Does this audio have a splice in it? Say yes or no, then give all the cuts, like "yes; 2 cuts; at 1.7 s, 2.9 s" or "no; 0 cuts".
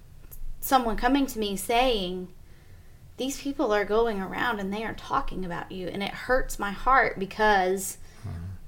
no; 0 cuts